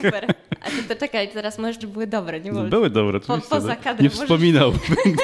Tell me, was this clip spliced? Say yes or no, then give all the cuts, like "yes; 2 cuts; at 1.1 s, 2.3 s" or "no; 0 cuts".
yes; 1 cut; at 1.8 s